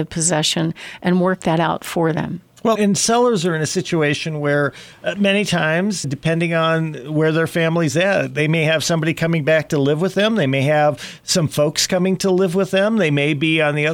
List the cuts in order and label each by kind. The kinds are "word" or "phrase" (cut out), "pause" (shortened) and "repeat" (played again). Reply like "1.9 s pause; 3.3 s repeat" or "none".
2.7 s word; 6.0 s word